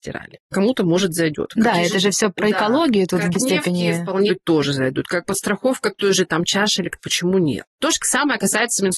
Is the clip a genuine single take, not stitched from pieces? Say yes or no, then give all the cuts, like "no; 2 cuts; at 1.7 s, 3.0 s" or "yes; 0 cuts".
no; 3 cuts; at 3.3 s, 4.3 s, 7.0 s